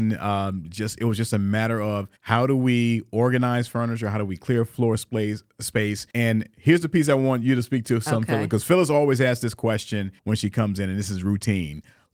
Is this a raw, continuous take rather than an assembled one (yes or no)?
no